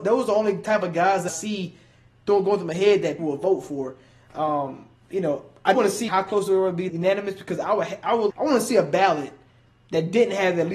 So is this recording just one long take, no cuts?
no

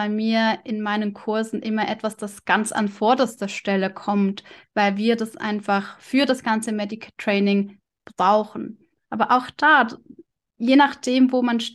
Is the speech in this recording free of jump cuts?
yes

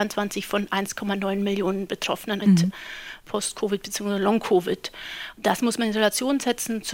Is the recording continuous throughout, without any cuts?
no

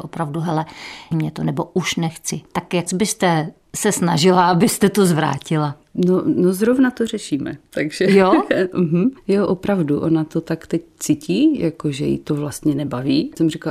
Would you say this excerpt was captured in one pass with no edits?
no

